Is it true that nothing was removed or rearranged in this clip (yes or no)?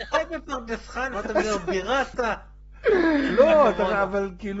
no